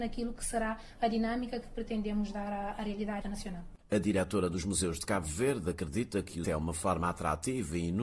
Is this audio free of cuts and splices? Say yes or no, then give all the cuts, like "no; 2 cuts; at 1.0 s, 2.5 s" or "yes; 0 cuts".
no; 2 cuts; at 3.2 s, 6.4 s